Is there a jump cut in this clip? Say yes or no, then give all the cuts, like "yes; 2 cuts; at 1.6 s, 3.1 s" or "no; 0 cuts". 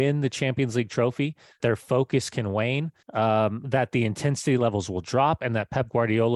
yes; 2 cuts; at 1.6 s, 3.0 s